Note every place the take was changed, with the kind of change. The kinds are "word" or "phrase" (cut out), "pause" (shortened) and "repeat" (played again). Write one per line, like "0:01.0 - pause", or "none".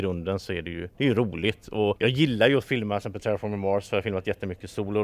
none